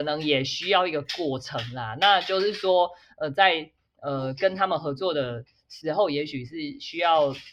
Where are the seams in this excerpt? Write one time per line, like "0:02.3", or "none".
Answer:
none